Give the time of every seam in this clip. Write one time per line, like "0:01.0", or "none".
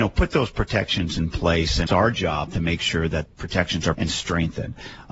0:01.9
0:03.3
0:03.9